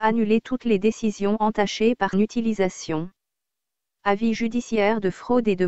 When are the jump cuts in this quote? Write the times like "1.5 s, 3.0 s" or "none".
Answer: 2.1 s